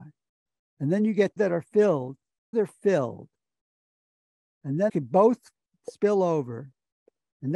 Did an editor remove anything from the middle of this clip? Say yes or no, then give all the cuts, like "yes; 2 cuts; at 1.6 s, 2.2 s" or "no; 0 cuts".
yes; 3 cuts; at 1.4 s, 2.5 s, 4.9 s